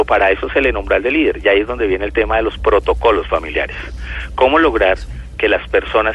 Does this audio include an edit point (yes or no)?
no